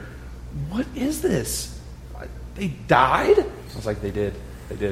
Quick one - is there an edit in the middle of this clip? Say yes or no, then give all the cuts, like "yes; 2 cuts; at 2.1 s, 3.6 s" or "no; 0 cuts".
no; 0 cuts